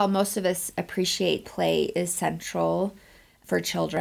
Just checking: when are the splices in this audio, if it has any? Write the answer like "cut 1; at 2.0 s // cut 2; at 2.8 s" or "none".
cut 1; at 1.4 s